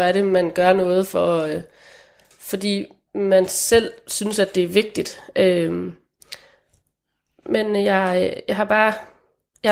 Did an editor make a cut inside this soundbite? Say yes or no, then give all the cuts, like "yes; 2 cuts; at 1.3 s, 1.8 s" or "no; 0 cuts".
no; 0 cuts